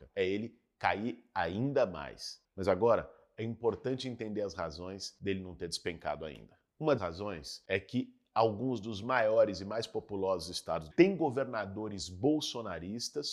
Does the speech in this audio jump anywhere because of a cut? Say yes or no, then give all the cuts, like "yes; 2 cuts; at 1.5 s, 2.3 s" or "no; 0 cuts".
yes; 2 cuts; at 7.0 s, 10.9 s